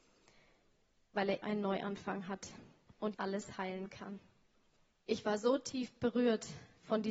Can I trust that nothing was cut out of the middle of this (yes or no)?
no